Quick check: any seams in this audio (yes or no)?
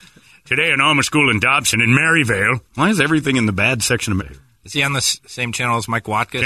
yes